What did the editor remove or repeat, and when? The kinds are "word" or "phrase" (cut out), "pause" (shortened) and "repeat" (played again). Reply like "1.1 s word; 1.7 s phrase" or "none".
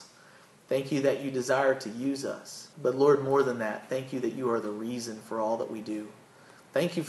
2.7 s pause